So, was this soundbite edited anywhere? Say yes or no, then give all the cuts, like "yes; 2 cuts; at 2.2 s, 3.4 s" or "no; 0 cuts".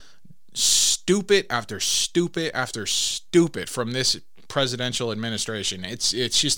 no; 0 cuts